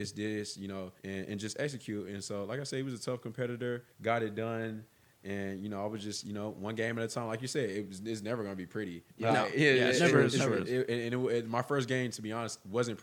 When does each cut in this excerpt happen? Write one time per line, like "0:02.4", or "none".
0:01.0
0:03.9
0:09.1